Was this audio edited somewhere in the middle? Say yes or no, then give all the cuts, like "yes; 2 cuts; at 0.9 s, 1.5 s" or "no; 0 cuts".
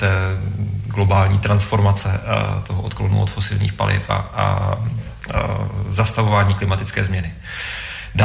no; 0 cuts